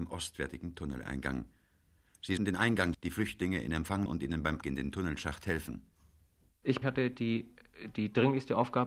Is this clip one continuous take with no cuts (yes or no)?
no